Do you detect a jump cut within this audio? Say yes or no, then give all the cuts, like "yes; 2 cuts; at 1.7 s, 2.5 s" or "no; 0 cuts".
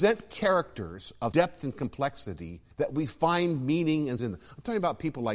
yes; 3 cuts; at 1.3 s, 2.7 s, 4.2 s